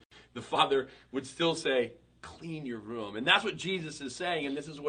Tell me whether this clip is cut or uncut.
uncut